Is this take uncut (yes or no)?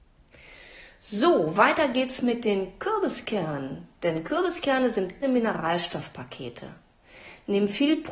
no